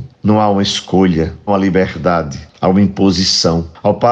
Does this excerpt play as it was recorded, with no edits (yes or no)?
no